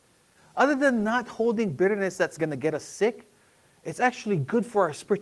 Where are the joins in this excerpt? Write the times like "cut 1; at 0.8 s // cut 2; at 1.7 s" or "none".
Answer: none